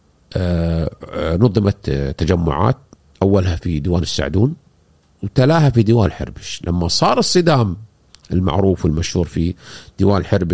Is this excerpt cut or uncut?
uncut